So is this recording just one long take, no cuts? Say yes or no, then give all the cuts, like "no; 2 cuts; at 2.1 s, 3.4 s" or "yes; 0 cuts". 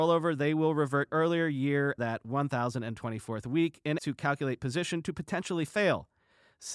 no; 3 cuts; at 1.1 s, 2.0 s, 4.0 s